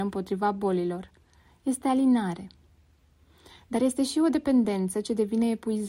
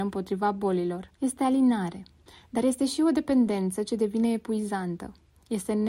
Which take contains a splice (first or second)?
second